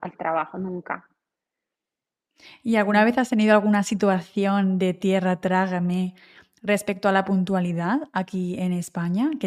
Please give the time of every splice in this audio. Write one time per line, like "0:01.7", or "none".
none